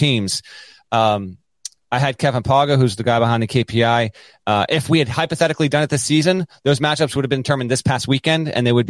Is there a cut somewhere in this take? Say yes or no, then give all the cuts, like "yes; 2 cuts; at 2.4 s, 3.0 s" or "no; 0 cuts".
no; 0 cuts